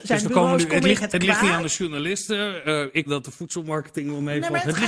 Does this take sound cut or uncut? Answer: cut